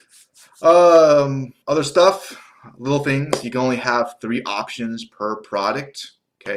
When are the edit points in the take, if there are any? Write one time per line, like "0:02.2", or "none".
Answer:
0:01.6